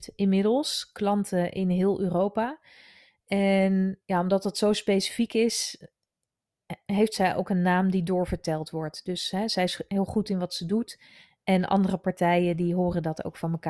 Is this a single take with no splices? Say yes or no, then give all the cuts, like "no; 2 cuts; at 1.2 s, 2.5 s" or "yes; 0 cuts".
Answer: yes; 0 cuts